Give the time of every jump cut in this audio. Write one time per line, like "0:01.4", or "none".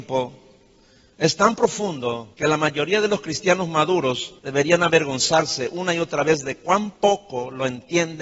0:02.3
0:04.4
0:07.0